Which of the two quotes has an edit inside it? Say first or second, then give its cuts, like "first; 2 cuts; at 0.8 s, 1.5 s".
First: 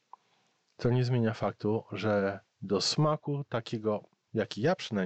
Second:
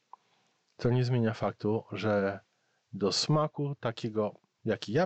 first; 1 cut; at 2.5 s